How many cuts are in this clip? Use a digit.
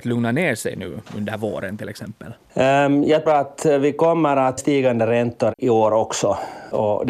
2